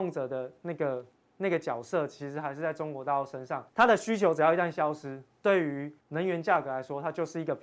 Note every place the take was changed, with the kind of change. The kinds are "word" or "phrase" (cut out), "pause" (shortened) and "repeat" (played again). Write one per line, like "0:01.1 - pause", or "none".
0:01.1 - pause
0:03.7 - pause
0:06.0 - pause